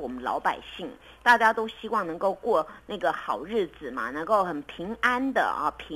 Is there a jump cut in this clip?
no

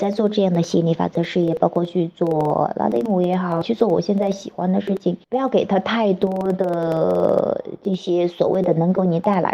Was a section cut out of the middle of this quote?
yes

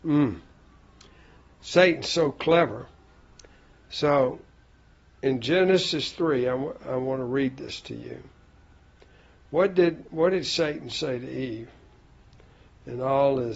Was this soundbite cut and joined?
no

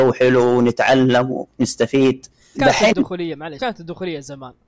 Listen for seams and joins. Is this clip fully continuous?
no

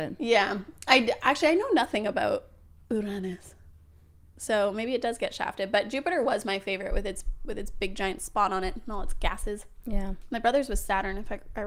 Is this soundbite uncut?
yes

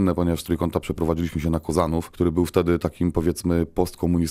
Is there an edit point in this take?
no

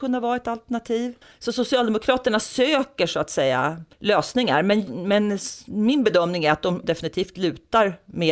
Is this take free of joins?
no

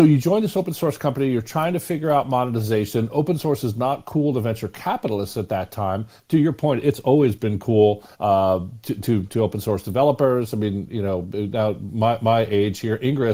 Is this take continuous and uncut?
no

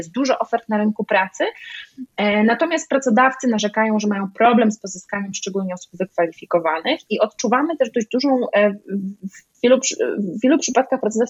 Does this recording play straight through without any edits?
yes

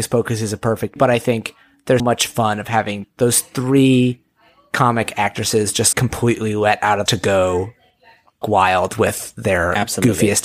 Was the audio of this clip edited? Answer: yes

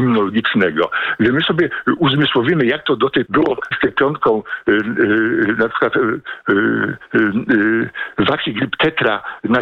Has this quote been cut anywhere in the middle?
yes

